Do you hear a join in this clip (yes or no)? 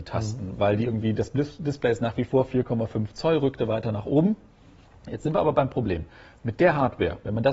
no